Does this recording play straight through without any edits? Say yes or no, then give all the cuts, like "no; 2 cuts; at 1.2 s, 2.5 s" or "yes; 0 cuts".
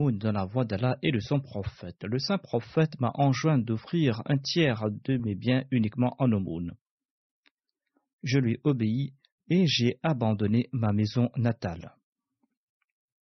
yes; 0 cuts